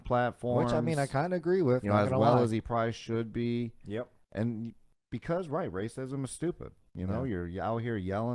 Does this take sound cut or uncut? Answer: uncut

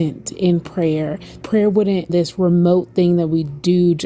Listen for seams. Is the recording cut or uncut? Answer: cut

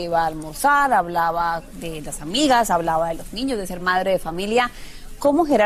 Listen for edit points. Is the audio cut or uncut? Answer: uncut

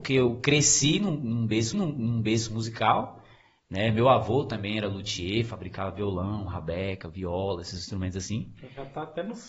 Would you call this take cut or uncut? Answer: cut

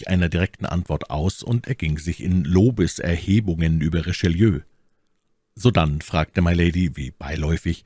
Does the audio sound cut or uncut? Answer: uncut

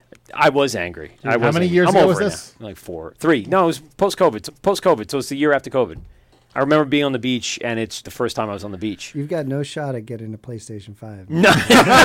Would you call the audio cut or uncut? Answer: cut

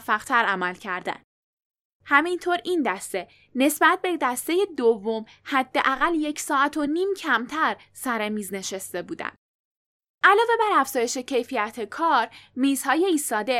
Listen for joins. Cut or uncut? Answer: uncut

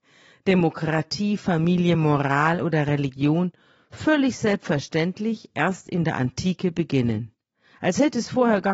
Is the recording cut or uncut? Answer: uncut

